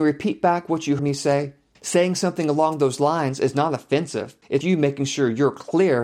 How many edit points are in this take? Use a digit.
2